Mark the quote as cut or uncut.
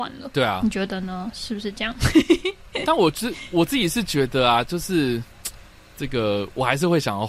uncut